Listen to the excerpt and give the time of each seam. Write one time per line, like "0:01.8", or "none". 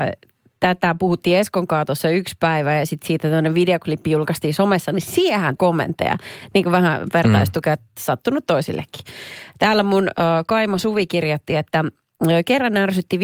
0:05.6